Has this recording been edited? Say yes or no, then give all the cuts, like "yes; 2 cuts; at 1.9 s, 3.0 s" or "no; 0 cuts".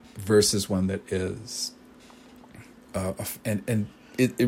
no; 0 cuts